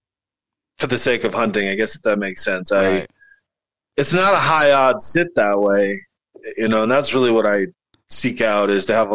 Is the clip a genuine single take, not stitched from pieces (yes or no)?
yes